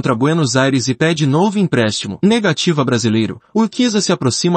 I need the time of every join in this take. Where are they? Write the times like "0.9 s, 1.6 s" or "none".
none